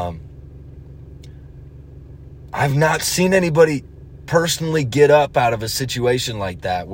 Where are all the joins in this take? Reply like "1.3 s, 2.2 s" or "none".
none